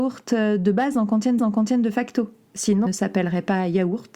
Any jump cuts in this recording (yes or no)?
yes